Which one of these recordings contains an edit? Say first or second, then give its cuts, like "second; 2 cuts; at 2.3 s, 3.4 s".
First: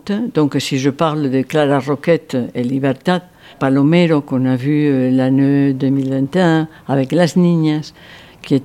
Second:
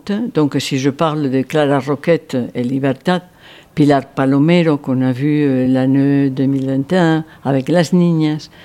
first; 1 cut; at 3.5 s